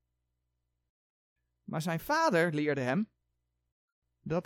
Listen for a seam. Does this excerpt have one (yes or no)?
no